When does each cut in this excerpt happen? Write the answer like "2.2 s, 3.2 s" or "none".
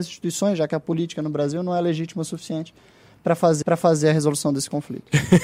3.6 s